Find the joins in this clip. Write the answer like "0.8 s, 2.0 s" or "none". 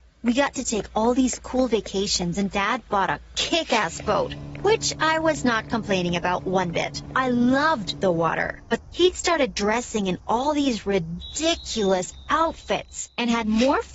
8.9 s